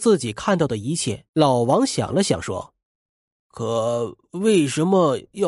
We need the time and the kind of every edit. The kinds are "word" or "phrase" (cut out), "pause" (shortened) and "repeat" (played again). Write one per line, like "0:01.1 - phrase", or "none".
0:01.3 - pause
0:02.8 - pause